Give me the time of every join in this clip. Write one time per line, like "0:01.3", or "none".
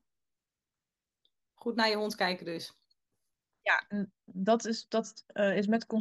none